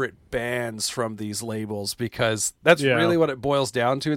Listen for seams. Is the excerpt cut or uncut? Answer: uncut